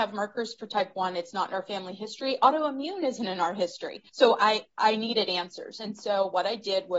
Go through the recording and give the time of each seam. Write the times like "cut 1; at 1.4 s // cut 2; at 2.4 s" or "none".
cut 1; at 4.1 s